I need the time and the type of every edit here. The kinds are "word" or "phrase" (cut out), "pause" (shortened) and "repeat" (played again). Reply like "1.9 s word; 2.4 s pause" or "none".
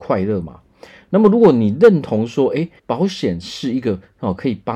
2.8 s pause